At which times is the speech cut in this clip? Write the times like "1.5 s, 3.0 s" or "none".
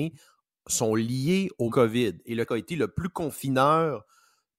1.7 s, 2.5 s